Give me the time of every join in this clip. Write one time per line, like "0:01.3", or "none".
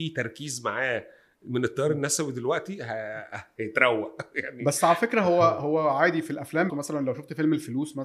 0:06.7